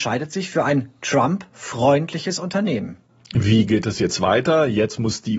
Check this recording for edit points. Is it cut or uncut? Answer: uncut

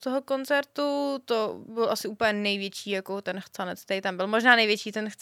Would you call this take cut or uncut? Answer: uncut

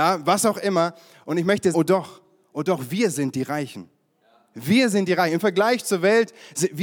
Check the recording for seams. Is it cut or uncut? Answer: cut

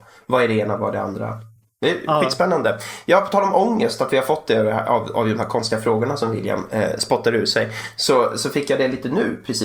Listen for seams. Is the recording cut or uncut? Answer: uncut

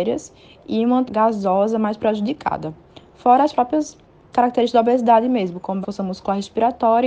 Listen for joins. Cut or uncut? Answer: cut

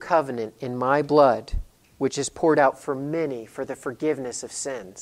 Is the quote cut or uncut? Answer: uncut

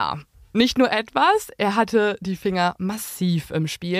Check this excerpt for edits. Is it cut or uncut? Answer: uncut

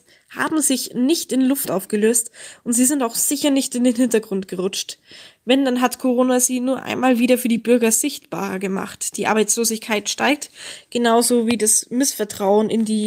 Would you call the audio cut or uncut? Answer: uncut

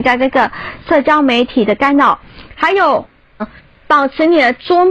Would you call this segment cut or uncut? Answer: cut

